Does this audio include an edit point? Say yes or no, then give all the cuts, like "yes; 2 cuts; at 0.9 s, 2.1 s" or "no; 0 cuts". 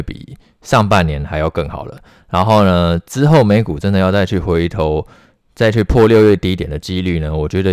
no; 0 cuts